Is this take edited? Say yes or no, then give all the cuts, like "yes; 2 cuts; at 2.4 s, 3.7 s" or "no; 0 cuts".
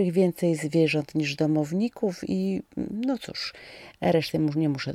no; 0 cuts